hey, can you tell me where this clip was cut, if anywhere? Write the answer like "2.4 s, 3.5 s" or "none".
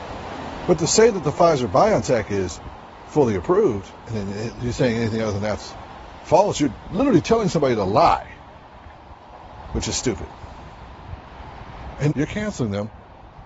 12.1 s